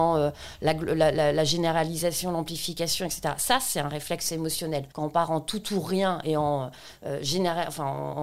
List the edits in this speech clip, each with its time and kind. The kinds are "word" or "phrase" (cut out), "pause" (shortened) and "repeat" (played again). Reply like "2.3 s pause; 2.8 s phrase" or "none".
4.9 s pause